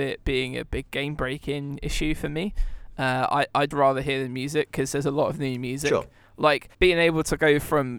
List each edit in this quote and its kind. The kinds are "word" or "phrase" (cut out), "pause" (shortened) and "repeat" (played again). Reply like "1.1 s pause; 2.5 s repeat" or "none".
3.7 s word; 6.7 s pause